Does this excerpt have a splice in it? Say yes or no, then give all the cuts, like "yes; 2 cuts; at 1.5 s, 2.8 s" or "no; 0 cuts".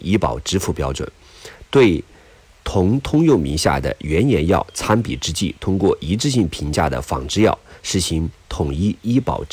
no; 0 cuts